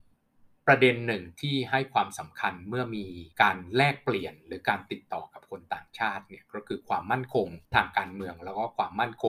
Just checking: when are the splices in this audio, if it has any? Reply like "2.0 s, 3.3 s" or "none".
3.3 s, 7.6 s